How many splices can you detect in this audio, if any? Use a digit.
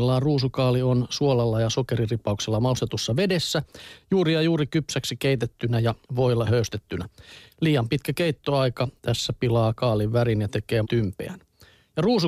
3